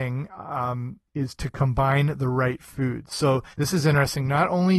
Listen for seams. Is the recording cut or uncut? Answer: cut